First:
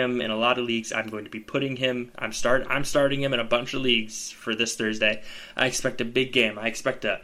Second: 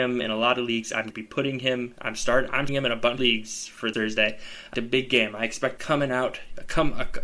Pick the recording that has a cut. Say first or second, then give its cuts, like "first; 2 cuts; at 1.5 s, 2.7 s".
second; 6 cuts; at 1.1 s, 2.7 s, 3.2 s, 3.9 s, 4.7 s, 5.8 s